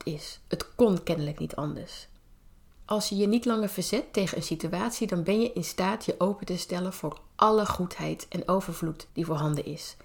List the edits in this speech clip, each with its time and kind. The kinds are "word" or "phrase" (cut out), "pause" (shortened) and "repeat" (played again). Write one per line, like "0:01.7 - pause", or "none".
0:09.1 - pause